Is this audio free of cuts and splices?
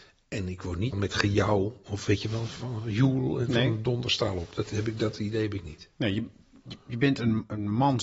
no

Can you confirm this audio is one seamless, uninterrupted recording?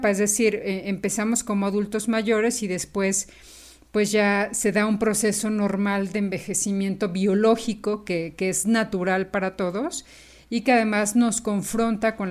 yes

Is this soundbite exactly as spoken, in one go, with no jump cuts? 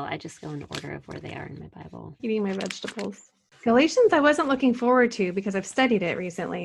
no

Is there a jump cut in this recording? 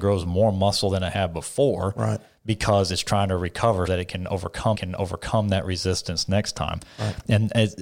yes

